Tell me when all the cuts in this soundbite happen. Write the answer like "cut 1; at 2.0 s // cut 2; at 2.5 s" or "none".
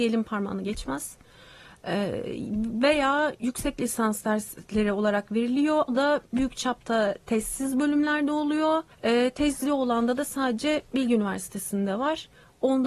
cut 1; at 5.9 s // cut 2; at 8.9 s // cut 3; at 10.8 s